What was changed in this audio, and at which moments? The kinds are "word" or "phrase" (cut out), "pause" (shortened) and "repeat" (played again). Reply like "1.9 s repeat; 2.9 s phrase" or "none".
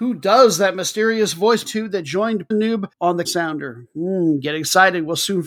1.7 s word; 2.5 s word; 2.9 s pause; 3.2 s word